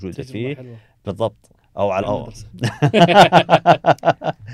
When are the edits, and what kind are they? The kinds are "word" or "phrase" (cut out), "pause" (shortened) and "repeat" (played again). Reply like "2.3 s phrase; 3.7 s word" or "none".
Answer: 1.6 s pause; 2.0 s word

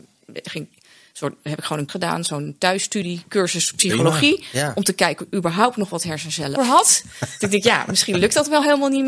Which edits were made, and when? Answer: 1.9 s word; 5.2 s word; 6.6 s word

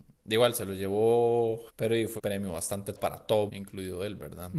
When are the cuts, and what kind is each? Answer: 1.7 s word; 2.2 s word; 3.0 s word; 3.5 s word

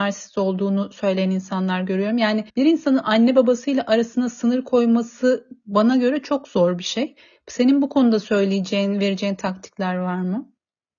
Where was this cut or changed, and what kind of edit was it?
2.5 s pause

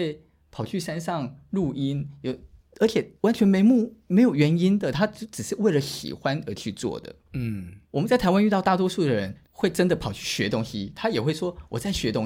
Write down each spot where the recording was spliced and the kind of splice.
2.6 s pause; 3.2 s pause; 7.8 s pause; 9.4 s pause

